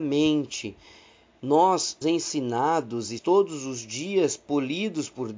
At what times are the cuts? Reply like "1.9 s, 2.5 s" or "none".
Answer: 2.0 s, 3.2 s

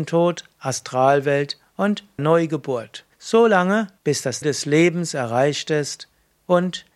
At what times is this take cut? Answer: 2.2 s, 3.1 s, 4.0 s, 4.4 s

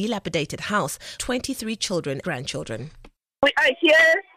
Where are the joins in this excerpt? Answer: 1.2 s, 2.2 s

